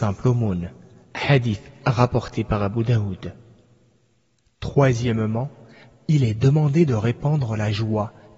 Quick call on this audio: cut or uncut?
uncut